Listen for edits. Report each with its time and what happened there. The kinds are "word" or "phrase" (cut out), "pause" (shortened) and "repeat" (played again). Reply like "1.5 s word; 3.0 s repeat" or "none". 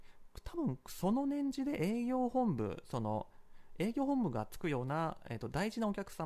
none